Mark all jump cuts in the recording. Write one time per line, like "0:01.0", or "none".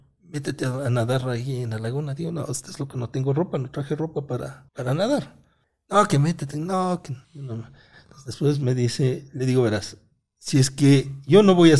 0:04.7
0:05.6
0:07.2